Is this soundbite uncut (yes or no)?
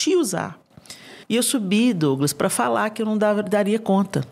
no